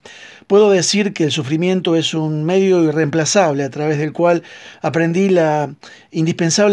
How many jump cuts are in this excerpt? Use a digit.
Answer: 0